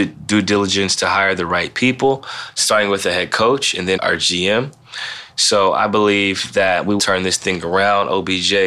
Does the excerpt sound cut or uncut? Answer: cut